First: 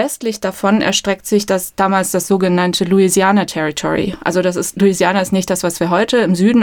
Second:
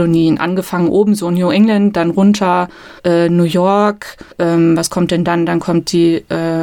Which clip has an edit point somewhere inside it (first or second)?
second